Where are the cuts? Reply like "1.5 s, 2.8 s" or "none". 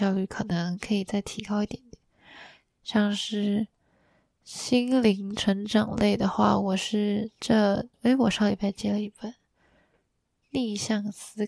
7.9 s